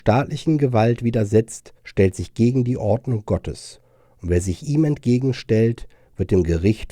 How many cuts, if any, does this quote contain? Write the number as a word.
one